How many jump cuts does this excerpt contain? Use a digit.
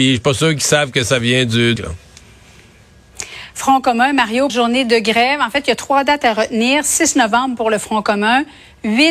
2